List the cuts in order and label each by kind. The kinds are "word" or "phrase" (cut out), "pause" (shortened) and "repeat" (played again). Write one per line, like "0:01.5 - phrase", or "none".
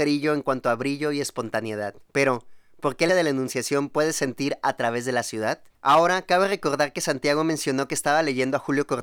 0:02.1 - pause
0:03.1 - word
0:05.7 - pause